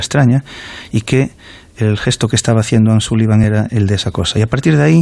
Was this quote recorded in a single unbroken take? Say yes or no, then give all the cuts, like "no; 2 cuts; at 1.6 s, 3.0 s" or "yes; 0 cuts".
yes; 0 cuts